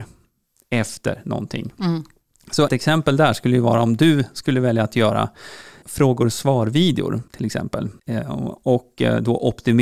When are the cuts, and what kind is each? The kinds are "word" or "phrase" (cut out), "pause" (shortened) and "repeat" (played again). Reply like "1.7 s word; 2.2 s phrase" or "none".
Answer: 2.7 s word; 5.8 s word; 7.3 s pause; 8.0 s pause